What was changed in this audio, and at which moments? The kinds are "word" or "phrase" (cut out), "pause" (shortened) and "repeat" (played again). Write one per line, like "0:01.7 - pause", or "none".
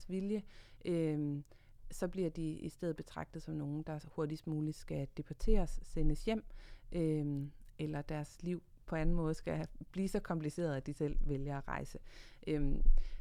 none

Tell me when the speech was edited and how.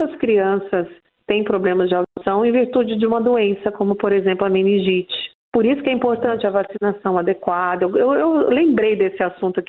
none

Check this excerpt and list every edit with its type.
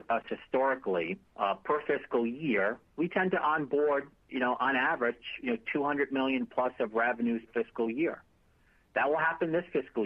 0:01.3 - pause
0:02.9 - pause
0:07.5 - word

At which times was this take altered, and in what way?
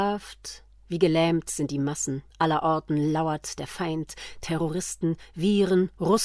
0:02.3 - pause

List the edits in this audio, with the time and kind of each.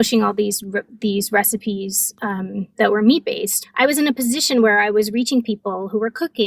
none

